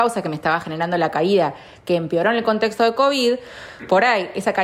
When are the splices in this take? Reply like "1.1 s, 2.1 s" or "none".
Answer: none